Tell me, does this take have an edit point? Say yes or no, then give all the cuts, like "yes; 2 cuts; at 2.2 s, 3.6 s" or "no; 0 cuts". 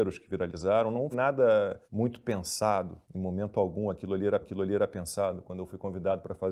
yes; 4 cuts; at 1.1 s, 1.8 s, 3.0 s, 4.4 s